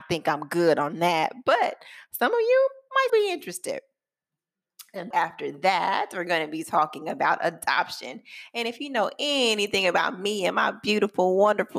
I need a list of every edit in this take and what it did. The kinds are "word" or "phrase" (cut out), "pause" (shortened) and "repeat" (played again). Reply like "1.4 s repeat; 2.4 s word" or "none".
3.1 s word; 5.1 s word